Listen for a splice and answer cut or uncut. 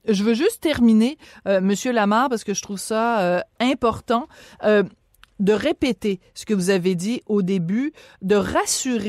uncut